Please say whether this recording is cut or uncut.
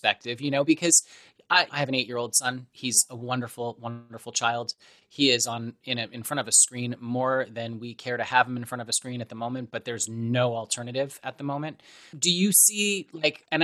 uncut